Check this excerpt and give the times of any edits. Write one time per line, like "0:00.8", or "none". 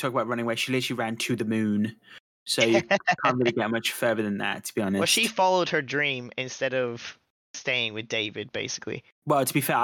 none

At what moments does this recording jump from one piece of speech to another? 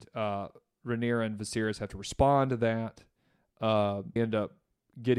0:04.2

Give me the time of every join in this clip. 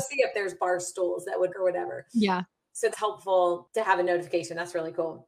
0:01.5
0:02.9

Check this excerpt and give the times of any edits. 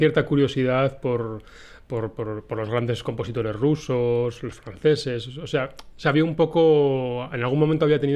none

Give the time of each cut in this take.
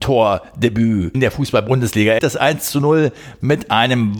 0:01.1
0:02.2

